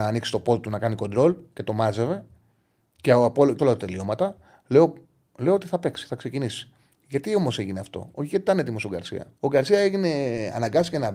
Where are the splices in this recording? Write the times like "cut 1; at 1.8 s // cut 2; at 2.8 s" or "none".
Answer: cut 1; at 3.6 s // cut 2; at 9.4 s

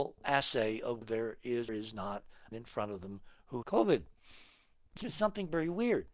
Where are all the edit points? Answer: cut 1; at 1.0 s // cut 2; at 1.7 s // cut 3; at 2.5 s // cut 4; at 3.6 s // cut 5; at 5.0 s

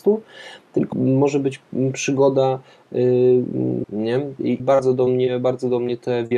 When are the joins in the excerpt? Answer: cut 1; at 0.9 s // cut 2; at 3.8 s // cut 3; at 4.6 s

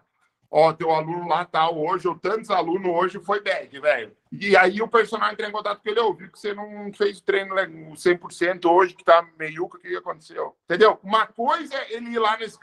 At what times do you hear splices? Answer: cut 1; at 4.2 s // cut 2; at 10.6 s

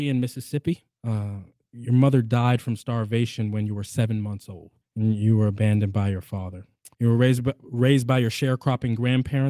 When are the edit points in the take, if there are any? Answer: cut 1; at 0.9 s // cut 2; at 4.8 s // cut 3; at 6.9 s

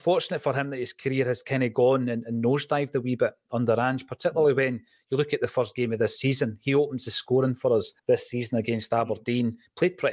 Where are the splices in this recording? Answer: cut 1; at 8.0 s

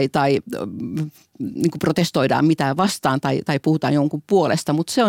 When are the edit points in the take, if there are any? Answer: none

